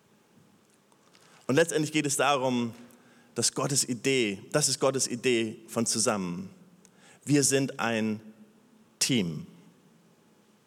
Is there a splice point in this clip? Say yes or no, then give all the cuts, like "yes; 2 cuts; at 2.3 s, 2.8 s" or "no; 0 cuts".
no; 0 cuts